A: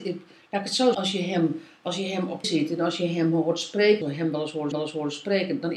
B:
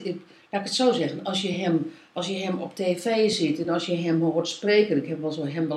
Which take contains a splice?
A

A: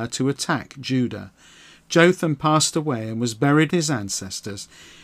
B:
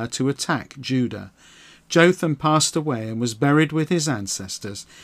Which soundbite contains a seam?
A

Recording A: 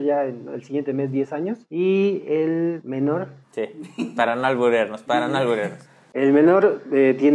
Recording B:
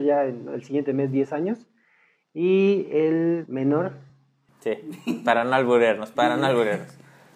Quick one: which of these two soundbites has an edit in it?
A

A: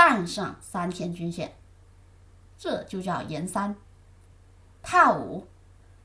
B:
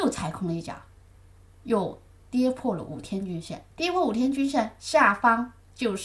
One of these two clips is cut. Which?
B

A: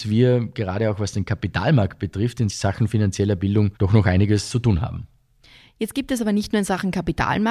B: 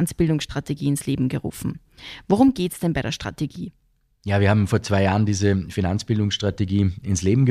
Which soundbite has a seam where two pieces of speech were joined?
A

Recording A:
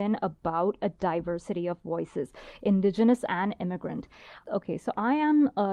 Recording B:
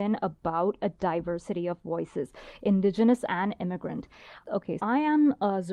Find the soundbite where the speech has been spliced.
B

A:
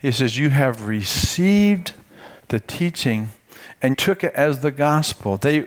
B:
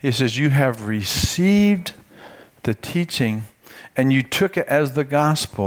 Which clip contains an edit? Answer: A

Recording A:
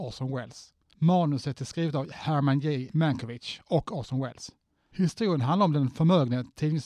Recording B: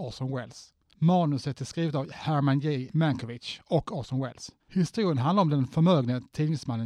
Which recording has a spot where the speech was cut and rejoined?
B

